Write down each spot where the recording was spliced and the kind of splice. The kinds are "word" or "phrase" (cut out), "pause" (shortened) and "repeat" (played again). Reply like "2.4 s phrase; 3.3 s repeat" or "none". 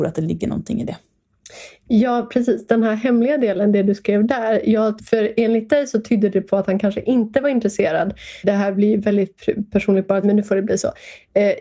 5.0 s word; 10.2 s phrase